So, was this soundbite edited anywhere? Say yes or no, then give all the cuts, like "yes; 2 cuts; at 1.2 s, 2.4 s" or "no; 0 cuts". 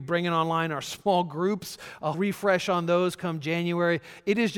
yes; 1 cut; at 2.1 s